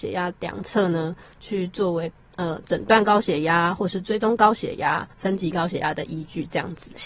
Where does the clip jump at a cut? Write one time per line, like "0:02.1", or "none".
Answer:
0:05.1

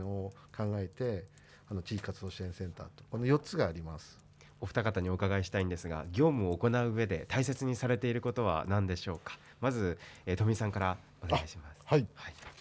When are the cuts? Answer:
0:11.1

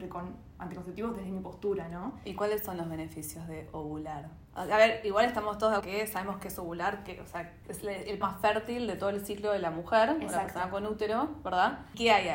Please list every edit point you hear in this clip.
0:05.8
0:07.6
0:08.2

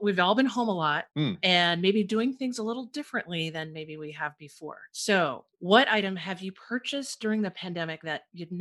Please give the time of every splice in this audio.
0:01.1

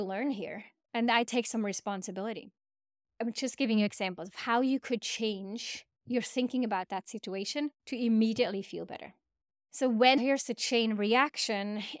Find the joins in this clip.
0:07.8
0:10.2

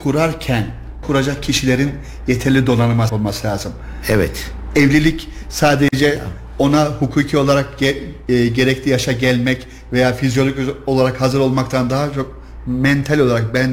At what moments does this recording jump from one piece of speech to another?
0:01.0
0:03.1

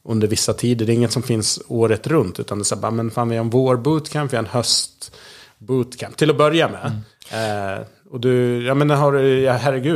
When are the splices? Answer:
none

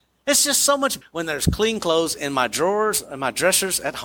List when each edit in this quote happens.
0:01.0

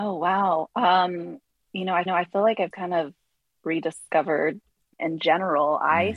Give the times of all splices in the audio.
0:01.5
0:02.1
0:02.7
0:05.0

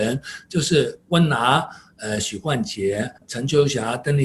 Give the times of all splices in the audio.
0:03.2

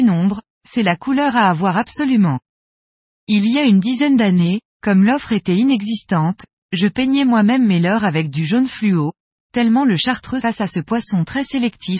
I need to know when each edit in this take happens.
0:10.4

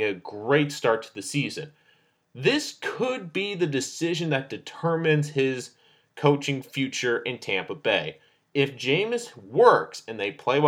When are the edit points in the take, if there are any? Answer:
none

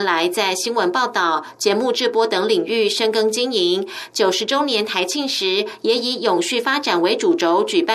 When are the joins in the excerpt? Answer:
none

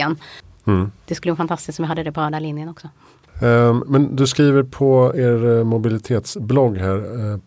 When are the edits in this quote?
none

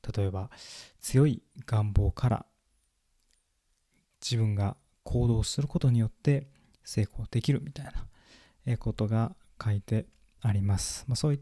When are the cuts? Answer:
none

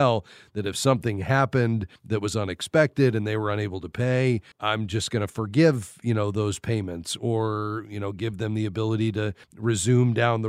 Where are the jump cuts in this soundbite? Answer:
0:02.0
0:04.5
0:09.4

